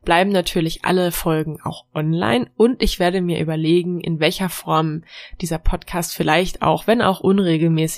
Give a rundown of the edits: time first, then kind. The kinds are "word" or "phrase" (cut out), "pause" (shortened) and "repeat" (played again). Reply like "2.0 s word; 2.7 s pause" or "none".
none